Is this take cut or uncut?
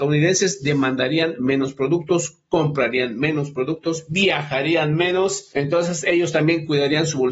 uncut